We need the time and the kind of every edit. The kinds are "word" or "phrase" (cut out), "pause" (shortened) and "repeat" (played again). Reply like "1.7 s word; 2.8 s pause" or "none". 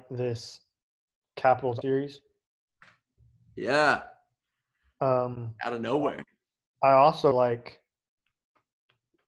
1.8 s word; 7.3 s word